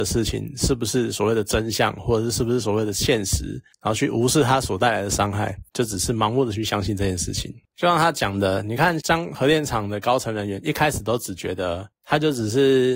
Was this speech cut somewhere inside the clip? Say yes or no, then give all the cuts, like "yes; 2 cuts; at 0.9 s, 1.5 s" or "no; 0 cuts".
yes; 2 cuts; at 5.7 s, 9.0 s